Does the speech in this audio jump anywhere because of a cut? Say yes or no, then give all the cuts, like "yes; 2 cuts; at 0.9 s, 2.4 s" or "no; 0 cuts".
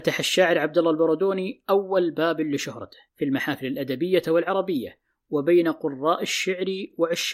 yes; 1 cut; at 3.1 s